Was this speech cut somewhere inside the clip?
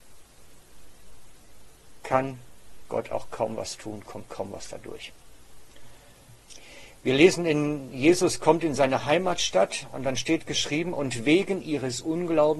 no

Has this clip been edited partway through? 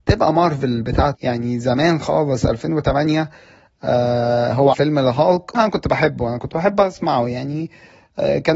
yes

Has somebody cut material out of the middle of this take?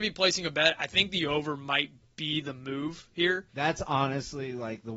yes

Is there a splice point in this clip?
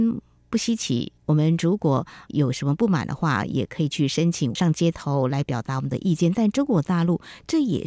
yes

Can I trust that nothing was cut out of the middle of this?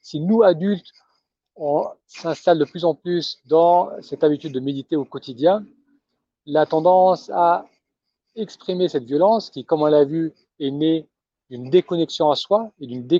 yes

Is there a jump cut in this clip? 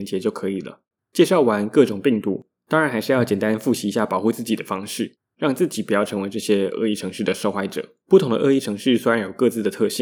yes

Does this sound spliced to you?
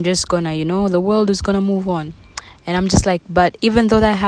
no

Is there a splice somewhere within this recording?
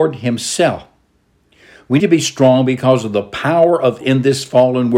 yes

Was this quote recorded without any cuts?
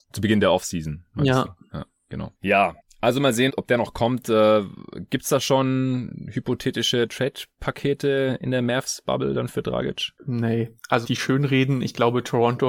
no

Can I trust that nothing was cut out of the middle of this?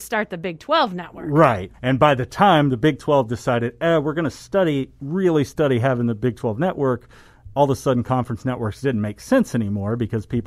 no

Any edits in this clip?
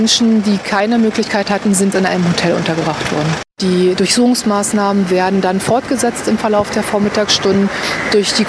yes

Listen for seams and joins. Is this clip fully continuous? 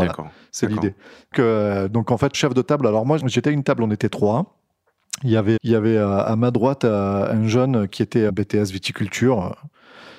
no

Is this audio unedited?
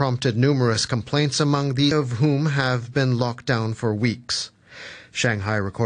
no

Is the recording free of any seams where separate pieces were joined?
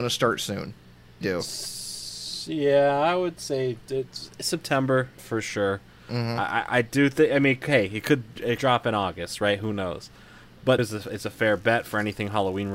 no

